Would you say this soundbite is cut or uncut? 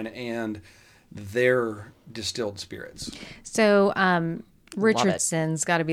uncut